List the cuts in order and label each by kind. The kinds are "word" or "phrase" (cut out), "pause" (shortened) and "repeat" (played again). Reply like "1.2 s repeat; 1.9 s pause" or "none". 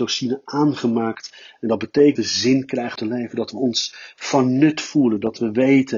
2.2 s word; 3.0 s word